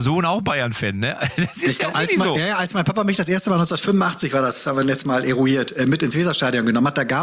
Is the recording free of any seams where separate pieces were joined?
no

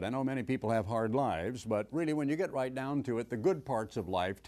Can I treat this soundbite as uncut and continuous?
yes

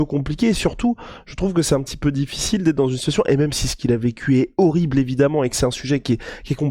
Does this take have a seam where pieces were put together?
no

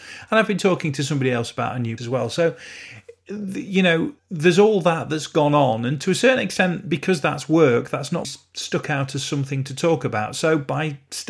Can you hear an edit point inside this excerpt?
yes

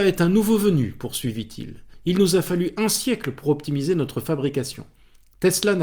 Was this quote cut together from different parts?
no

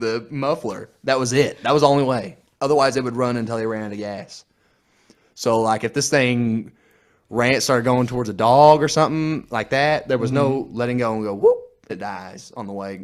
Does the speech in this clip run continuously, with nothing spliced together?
no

